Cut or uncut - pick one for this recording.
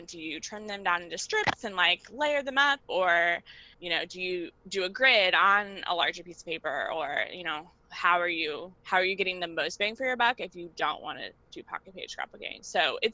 cut